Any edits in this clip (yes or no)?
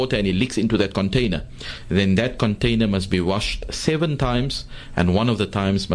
no